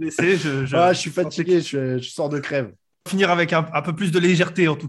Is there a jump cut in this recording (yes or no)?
yes